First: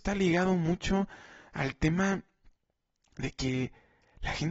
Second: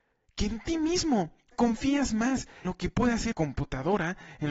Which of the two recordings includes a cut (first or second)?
second